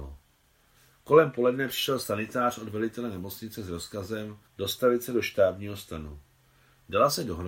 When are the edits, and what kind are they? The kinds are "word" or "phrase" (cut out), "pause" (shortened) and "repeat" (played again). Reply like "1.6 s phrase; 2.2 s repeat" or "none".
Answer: 4.5 s pause